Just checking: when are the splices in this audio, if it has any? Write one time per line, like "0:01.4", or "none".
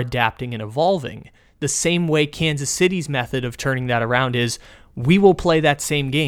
none